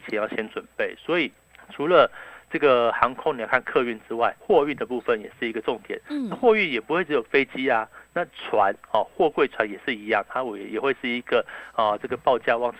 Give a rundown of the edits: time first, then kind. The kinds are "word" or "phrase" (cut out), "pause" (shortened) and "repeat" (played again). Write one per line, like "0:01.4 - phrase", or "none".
0:01.5 - pause
0:04.4 - pause